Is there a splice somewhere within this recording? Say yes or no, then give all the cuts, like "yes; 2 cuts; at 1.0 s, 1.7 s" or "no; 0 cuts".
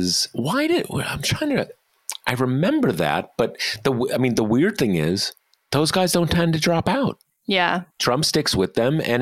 yes; 1 cut; at 7.9 s